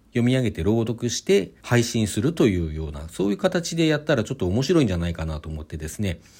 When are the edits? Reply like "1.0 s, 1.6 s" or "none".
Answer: 1.6 s